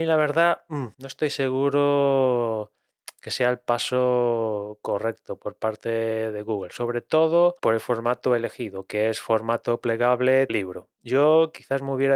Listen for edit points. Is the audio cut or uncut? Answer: cut